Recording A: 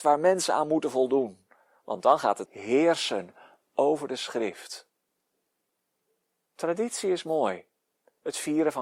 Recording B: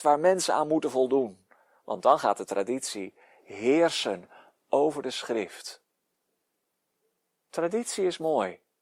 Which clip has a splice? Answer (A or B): A